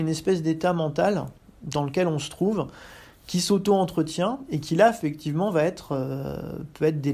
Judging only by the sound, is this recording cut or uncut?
uncut